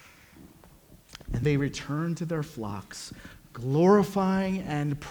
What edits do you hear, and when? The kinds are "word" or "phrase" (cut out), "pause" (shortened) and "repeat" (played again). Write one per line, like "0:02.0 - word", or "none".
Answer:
0:01.4 - word